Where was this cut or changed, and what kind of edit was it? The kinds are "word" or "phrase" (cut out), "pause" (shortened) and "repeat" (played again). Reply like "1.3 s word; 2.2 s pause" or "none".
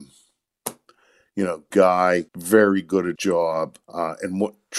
1.7 s word; 2.3 s pause; 3.2 s word; 3.8 s pause